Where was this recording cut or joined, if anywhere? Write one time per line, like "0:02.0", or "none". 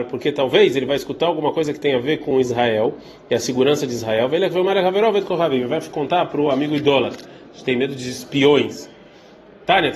none

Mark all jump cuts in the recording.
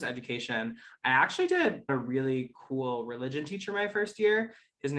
0:01.9

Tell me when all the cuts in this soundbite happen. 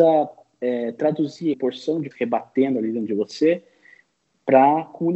0:01.5
0:02.1

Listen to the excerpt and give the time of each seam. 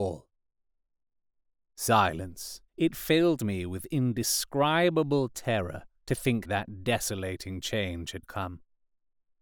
0:02.7
0:05.9
0:06.4

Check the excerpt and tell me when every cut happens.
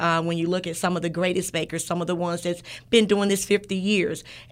none

